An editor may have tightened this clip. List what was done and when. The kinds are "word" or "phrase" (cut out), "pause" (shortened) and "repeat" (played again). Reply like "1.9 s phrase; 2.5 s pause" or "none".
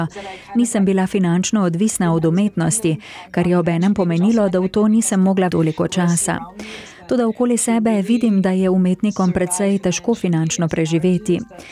5.5 s word